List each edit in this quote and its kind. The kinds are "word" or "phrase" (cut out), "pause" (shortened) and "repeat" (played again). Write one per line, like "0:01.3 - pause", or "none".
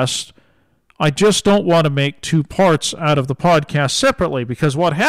none